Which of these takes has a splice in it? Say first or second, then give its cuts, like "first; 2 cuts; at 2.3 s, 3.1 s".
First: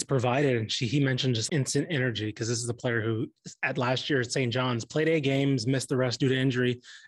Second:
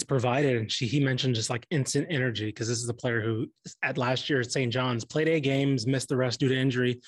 first; 1 cut; at 1.5 s